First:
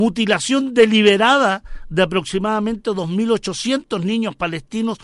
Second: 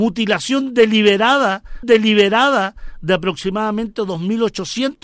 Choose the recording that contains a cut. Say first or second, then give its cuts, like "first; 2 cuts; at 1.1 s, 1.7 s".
second; 1 cut; at 1.8 s